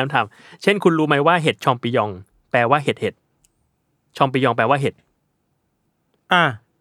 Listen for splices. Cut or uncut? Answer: uncut